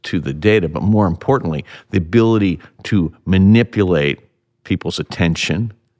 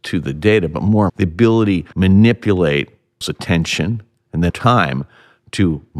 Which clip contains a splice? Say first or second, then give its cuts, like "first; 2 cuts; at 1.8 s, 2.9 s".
second; 4 cuts; at 1.1 s, 1.9 s, 3.2 s, 4.5 s